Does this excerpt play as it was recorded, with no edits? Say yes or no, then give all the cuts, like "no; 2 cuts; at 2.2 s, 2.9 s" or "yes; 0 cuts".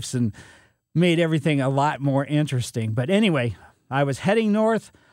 yes; 0 cuts